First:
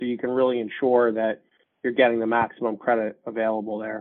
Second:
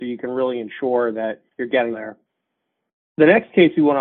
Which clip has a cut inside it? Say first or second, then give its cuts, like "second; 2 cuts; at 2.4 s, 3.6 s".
second; 2 cuts; at 1.5 s, 1.9 s